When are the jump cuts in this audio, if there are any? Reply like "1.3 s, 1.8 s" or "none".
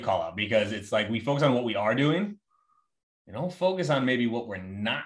none